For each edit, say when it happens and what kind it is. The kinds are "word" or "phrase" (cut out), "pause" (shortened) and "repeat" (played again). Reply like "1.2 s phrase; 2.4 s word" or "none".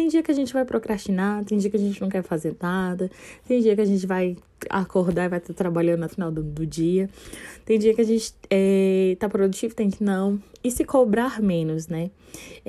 6.1 s word; 9.9 s word